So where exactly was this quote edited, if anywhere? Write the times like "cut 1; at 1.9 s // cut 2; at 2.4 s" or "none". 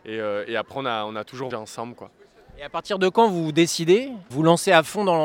cut 1; at 1.5 s // cut 2; at 4.3 s